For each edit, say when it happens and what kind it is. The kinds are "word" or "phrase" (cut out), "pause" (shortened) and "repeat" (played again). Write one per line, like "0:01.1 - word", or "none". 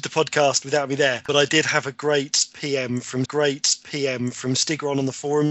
0:03.2 - repeat